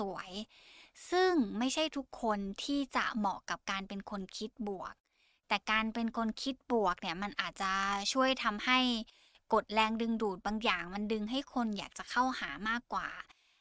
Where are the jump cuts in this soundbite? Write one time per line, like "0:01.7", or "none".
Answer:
none